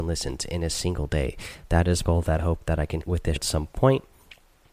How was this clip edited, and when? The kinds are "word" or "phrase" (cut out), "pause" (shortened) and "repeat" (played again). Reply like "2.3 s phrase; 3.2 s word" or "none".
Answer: 2.0 s phrase; 2.4 s word; 3.0 s word; 3.4 s word